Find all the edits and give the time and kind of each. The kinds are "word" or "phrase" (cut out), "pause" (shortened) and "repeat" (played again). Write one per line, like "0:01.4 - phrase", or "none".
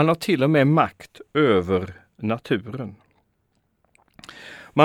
none